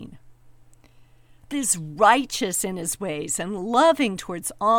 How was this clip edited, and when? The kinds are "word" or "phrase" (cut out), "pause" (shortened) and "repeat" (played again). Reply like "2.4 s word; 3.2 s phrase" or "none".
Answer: 1.5 s word